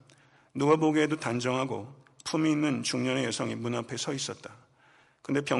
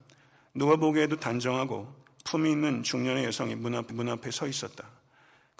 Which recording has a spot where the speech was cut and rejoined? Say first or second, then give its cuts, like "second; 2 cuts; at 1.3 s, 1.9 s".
second; 1 cut; at 3.9 s